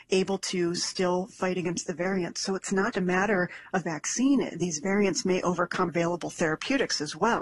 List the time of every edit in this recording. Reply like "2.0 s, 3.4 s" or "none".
2.9 s, 3.8 s, 5.9 s